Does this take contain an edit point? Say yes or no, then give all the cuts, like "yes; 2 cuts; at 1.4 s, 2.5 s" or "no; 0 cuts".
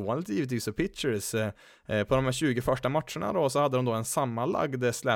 no; 0 cuts